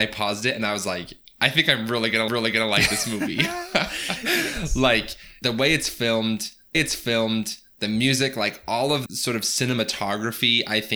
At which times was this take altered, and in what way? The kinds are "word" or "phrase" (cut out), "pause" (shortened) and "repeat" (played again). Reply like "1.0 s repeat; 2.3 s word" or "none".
2.3 s repeat; 5.4 s word; 6.7 s repeat; 9.1 s word